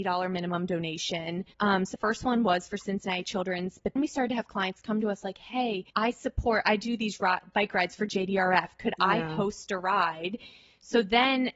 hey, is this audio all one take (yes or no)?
no